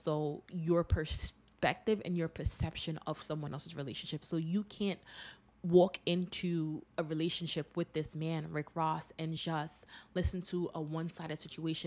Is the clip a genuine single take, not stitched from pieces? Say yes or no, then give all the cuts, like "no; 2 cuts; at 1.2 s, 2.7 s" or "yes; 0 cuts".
yes; 0 cuts